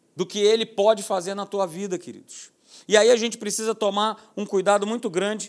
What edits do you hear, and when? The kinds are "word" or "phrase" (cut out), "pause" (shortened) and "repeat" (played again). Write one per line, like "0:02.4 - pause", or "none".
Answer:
none